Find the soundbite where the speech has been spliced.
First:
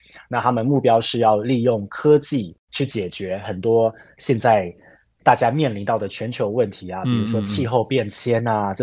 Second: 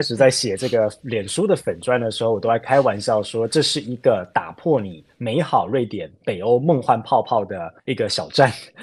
second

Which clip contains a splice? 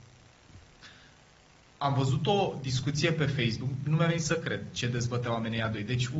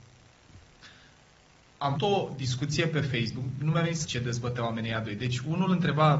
second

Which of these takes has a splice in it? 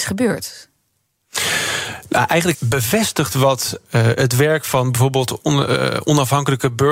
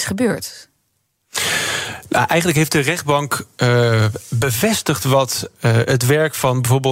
first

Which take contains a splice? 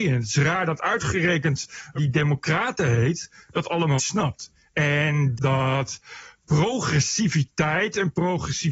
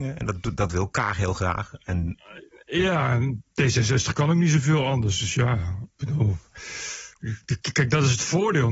first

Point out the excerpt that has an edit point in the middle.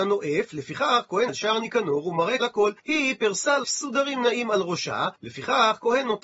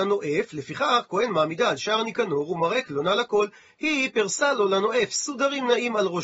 first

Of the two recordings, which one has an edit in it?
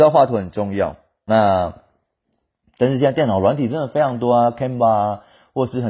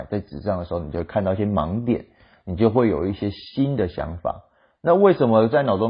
first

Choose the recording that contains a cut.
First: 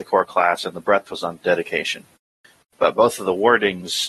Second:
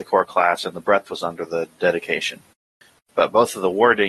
first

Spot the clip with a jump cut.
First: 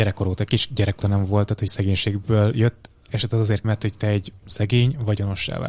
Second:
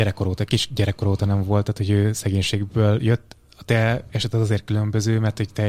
first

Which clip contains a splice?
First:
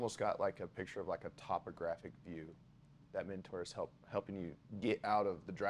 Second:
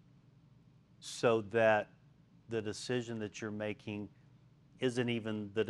second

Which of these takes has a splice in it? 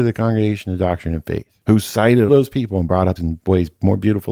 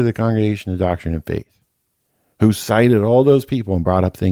first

